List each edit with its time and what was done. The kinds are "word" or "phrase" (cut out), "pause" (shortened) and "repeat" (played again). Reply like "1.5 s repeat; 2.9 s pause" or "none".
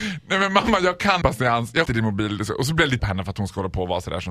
1.2 s word; 1.9 s word; 3.0 s word